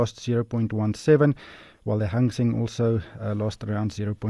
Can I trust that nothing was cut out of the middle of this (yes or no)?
yes